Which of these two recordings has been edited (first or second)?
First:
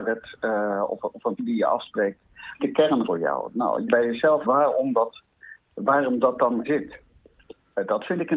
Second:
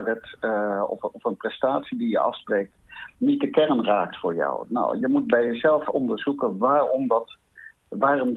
first